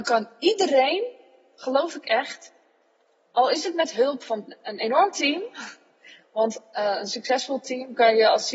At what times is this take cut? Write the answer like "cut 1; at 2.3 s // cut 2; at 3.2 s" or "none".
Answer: none